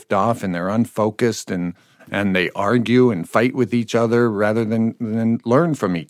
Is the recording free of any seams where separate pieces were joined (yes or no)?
yes